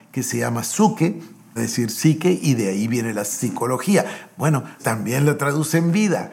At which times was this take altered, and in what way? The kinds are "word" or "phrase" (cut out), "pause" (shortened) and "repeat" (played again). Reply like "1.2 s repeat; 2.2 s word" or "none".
1.6 s phrase; 4.8 s word